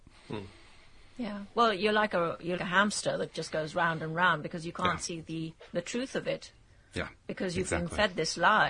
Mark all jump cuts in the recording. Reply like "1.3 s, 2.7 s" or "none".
2.6 s